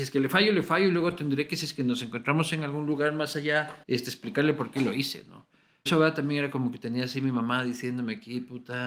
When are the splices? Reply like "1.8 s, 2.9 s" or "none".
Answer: 3.8 s, 5.9 s